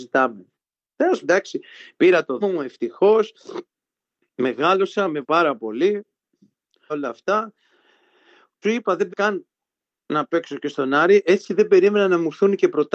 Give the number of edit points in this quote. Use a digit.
6